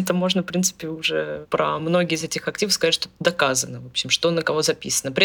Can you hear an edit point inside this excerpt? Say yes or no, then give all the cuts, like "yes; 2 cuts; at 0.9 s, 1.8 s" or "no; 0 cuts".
no; 0 cuts